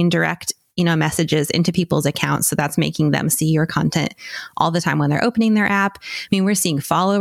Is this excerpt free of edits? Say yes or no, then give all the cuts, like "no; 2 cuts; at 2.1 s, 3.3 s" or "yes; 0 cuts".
yes; 0 cuts